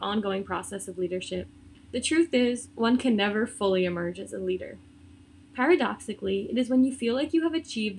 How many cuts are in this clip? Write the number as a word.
one